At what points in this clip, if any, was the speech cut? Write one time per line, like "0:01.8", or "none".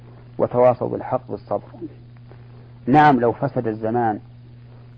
0:01.3